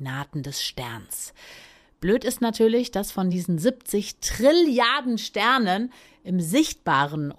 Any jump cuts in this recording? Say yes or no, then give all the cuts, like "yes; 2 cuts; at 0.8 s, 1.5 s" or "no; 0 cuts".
no; 0 cuts